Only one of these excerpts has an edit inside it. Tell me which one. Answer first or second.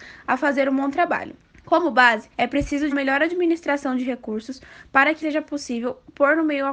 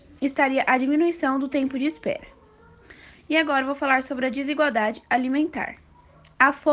first